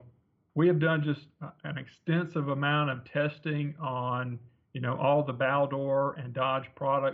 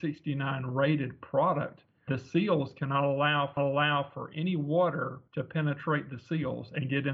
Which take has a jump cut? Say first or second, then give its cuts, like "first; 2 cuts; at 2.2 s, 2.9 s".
second; 3 cuts; at 2.1 s, 3.6 s, 5.3 s